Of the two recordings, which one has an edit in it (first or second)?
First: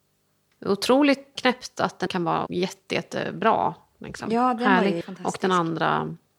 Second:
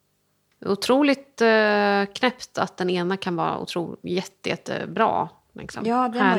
first